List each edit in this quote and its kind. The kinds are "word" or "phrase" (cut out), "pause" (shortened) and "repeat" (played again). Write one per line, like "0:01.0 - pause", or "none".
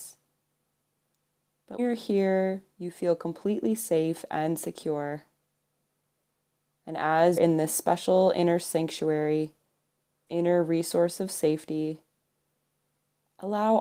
0:01.8 - word
0:07.4 - phrase
0:10.3 - word